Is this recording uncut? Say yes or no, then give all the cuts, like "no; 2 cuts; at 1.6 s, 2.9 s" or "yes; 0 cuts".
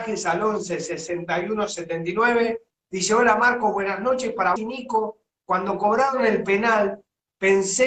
no; 1 cut; at 4.6 s